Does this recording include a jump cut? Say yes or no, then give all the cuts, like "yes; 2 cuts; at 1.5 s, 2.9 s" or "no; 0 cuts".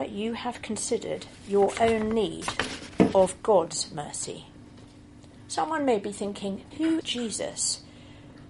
yes; 2 cuts; at 6.7 s, 7.0 s